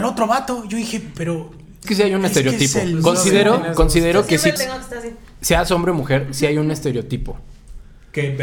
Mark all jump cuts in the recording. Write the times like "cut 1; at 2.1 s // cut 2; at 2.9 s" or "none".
cut 1; at 1.8 s // cut 2; at 4.6 s